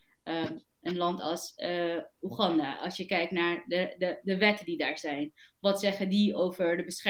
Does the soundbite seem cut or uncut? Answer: uncut